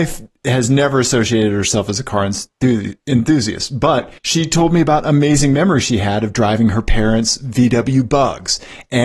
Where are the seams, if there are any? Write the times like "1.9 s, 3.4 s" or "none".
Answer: 4.2 s